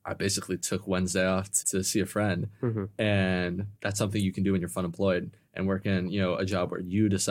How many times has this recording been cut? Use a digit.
2